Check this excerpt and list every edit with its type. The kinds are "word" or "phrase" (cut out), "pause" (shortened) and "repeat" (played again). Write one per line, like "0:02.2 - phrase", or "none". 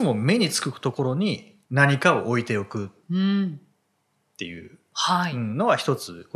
0:01.6 - pause